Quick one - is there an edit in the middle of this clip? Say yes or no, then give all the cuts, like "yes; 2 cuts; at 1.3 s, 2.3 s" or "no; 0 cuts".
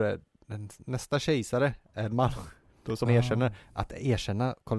yes; 1 cut; at 3.1 s